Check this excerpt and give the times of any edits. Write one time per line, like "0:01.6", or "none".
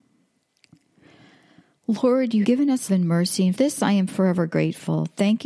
0:02.4
0:02.9
0:03.5

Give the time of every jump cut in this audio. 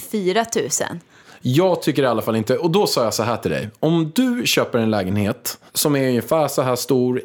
0:01.2
0:05.7

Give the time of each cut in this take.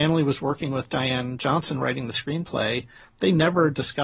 none

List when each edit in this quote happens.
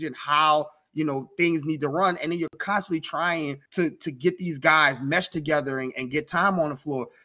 0:03.7

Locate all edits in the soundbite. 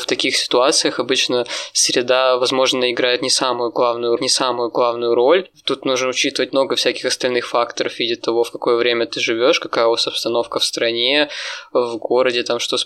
0:04.2

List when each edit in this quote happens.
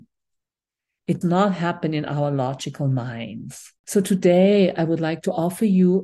0:01.2
0:03.8

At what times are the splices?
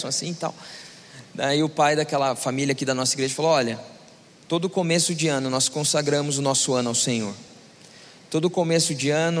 none

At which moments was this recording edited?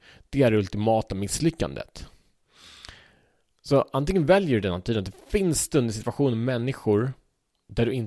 none

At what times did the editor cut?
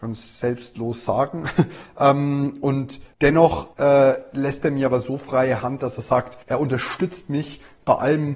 0:03.7
0:06.4

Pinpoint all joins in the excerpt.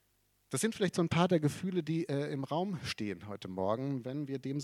none

